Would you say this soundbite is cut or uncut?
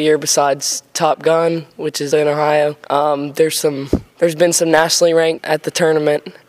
cut